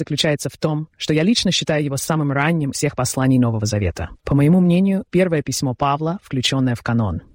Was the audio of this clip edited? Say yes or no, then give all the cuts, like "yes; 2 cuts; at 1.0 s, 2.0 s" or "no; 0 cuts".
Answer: yes; 3 cuts; at 2.7 s, 4.2 s, 5.1 s